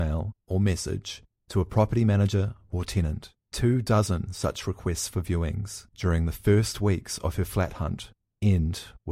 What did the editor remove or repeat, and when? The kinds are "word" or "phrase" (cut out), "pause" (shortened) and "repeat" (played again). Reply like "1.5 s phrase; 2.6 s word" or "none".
3.4 s pause; 5.9 s pause